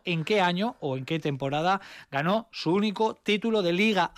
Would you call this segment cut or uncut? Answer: uncut